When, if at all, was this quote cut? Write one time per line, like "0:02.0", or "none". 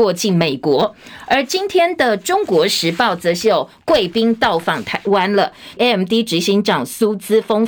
0:05.8